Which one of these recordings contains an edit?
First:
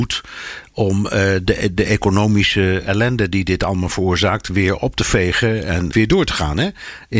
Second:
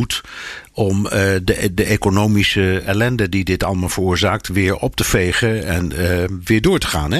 first; 1 cut; at 5.9 s

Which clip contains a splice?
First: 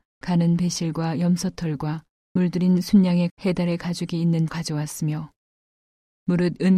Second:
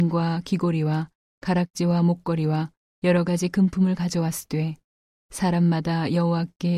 first; 3 cuts; at 2.4 s, 3.3 s, 4.5 s

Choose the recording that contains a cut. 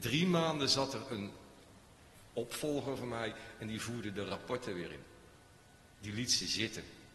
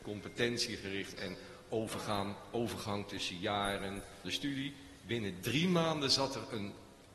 second; 2 cuts; at 1.2 s, 4.2 s

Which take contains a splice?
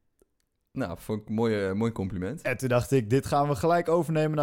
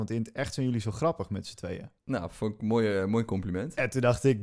second; 1 cut; at 2.0 s

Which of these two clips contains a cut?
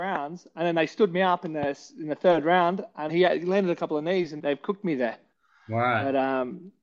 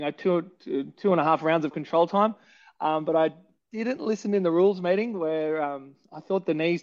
first; 2 cuts; at 3.1 s, 4.4 s

